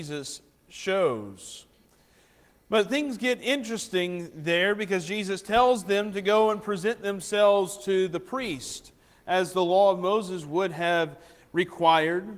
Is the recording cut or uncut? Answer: uncut